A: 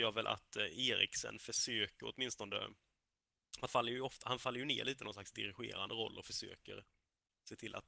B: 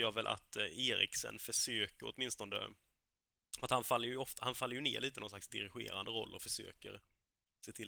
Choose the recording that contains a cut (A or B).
A